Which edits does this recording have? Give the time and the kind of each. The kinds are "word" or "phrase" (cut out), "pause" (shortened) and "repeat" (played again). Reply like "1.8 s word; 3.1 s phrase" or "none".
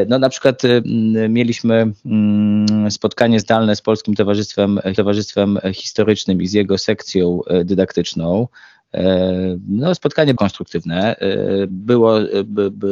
4.9 s repeat; 10.4 s word